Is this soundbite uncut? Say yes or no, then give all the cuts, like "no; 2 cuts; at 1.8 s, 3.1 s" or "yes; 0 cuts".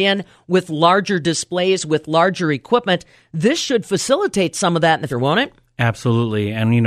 no; 1 cut; at 5.1 s